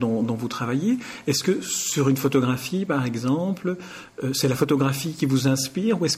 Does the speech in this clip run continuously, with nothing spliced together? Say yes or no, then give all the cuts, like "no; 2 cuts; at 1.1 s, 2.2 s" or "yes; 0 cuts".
yes; 0 cuts